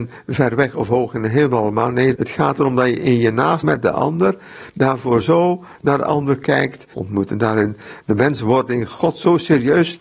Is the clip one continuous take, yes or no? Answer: no